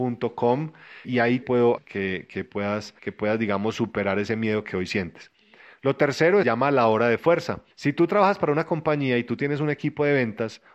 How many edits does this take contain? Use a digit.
6